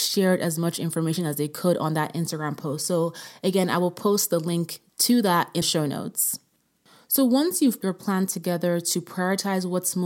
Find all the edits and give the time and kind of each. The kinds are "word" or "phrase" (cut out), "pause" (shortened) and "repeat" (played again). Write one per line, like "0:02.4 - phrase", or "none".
0:05.6 - word
0:07.8 - word

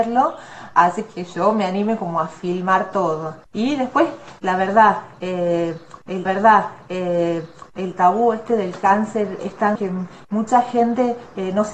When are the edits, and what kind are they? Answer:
0:03.5 - pause
0:06.3 - repeat
0:09.4 - word
0:09.8 - word

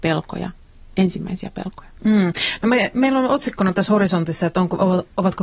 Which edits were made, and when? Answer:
none

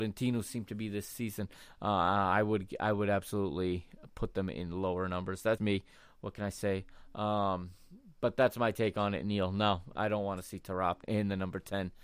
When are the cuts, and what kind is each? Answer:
0:05.6 - word
0:11.0 - word

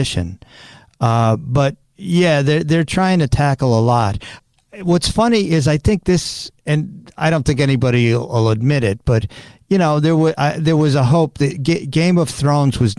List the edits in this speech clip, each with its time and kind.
none

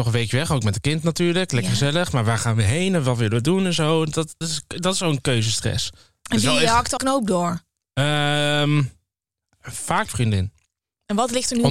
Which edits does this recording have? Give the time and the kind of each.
0:04.4 - word
0:07.0 - word
0:10.1 - word

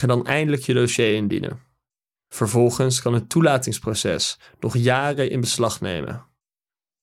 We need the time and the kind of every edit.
none

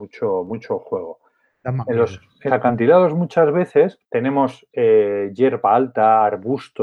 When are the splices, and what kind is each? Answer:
0:02.5 - word
0:04.0 - pause

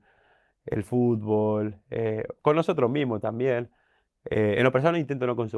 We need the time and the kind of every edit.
none

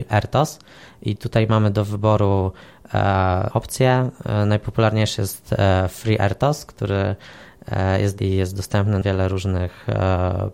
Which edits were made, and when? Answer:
0:03.5 - word
0:08.2 - word
0:09.0 - word

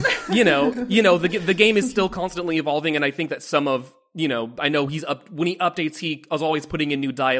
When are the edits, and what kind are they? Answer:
none

